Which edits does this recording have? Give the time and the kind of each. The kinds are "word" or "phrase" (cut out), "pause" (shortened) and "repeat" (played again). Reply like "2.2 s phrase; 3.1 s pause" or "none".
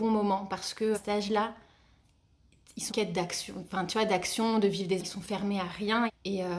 0.9 s word; 2.9 s word; 5.0 s word